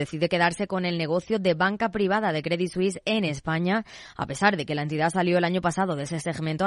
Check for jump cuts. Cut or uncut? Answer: uncut